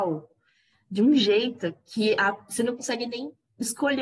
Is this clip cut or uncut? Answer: uncut